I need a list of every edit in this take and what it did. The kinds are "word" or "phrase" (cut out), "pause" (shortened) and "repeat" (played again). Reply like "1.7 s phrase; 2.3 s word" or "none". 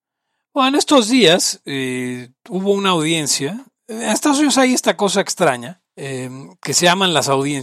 3.8 s pause; 5.9 s pause